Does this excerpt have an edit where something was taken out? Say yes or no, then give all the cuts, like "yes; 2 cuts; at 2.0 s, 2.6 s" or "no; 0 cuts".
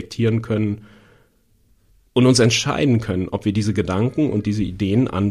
no; 0 cuts